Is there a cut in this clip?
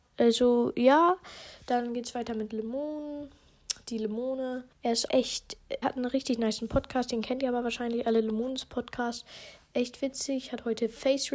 yes; 3 cuts; at 4.7 s, 5.1 s, 5.8 s

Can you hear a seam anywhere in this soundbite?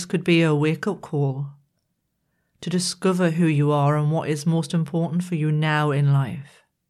no; 0 cuts

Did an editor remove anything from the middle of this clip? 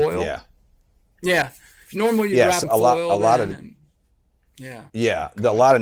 yes; 2 cuts; at 2.6 s, 4.9 s

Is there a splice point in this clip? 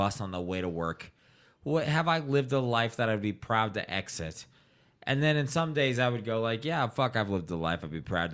no; 0 cuts

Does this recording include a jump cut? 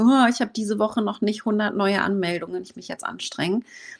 yes; 1 cut; at 2.7 s

